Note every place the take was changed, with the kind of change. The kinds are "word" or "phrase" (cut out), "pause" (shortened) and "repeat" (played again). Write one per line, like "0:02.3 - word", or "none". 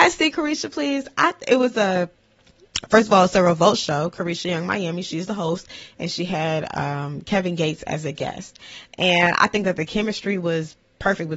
none